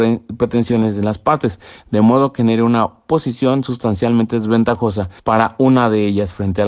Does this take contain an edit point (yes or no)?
yes